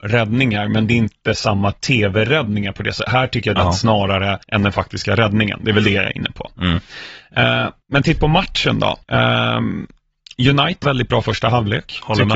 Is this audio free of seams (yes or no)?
no